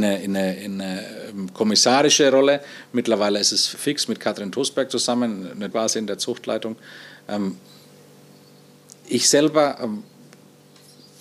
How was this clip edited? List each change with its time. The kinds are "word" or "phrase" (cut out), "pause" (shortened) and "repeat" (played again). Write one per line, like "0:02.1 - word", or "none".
0:03.7 - word
0:05.7 - word